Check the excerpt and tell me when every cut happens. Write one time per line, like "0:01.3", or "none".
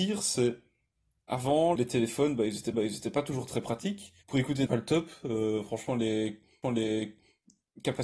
0:01.8
0:02.7
0:04.2
0:04.7
0:06.6